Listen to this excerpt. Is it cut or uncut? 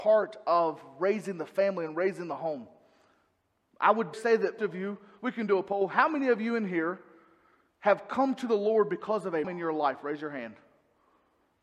cut